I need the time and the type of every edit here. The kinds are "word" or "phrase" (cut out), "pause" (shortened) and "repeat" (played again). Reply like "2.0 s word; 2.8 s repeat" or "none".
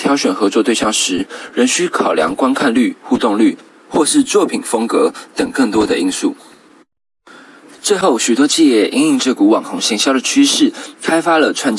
none